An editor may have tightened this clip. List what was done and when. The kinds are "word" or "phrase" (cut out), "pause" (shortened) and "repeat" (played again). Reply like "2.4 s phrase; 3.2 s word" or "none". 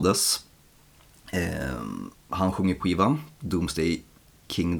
2.8 s word